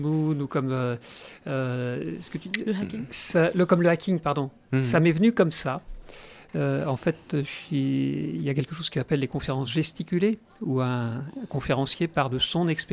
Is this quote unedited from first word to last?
yes; 0 cuts

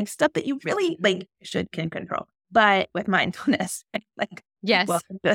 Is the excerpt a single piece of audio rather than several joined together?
no; 2 cuts; at 1.7 s, 2.3 s

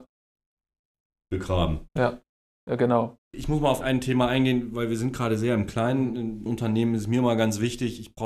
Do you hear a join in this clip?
yes; 2 cuts; at 3.8 s, 6.5 s

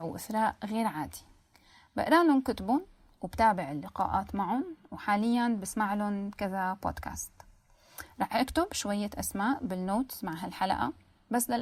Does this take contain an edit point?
no; 0 cuts

